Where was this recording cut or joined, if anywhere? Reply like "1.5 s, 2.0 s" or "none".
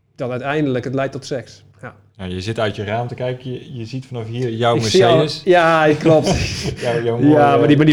1.7 s